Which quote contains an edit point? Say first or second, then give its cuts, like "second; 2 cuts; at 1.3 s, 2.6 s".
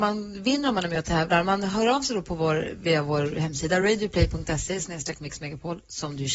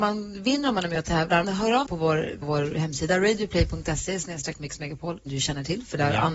second; 4 cuts; at 1.4 s, 1.9 s, 2.4 s, 5.3 s